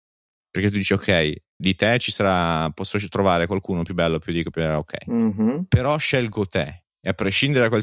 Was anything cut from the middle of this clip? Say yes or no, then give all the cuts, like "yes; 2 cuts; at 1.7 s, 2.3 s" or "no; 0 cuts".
yes; 1 cut; at 1.6 s